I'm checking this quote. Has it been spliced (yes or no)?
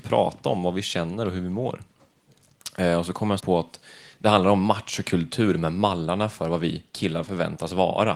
yes